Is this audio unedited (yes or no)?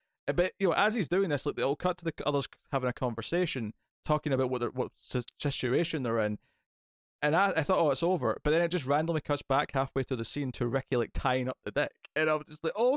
yes